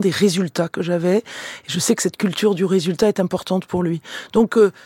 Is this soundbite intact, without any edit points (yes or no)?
yes